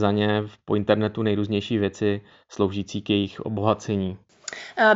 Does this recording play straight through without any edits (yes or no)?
yes